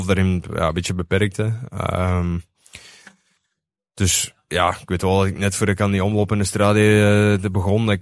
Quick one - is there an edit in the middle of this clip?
no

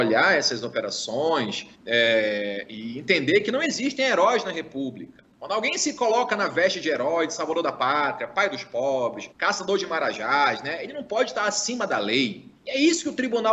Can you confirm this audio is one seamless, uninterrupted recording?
no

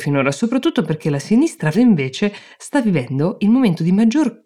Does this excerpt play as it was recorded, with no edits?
no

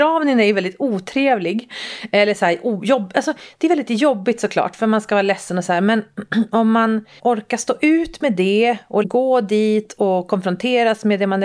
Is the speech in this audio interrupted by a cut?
yes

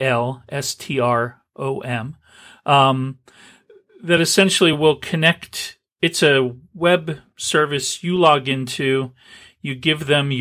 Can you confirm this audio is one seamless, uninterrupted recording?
yes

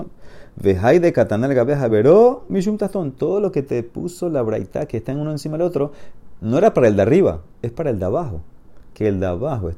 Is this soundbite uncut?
yes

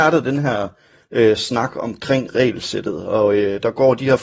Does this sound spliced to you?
no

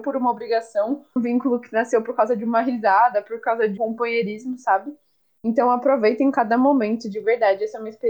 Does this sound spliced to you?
yes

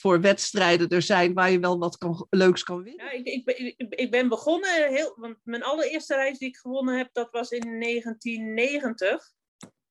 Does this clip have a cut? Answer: no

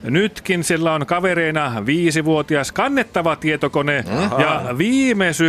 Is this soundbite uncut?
yes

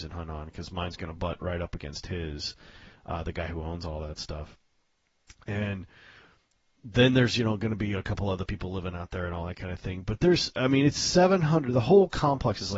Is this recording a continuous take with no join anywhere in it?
yes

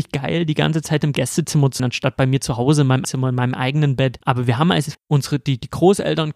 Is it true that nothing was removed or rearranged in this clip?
no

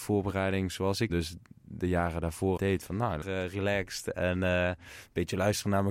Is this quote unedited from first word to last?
no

